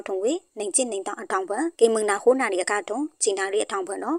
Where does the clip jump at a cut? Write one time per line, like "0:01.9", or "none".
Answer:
0:01.7